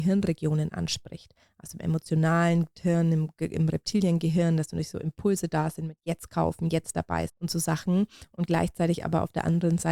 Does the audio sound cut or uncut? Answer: cut